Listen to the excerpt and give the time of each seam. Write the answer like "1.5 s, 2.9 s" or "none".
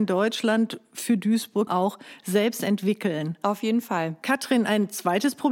1.7 s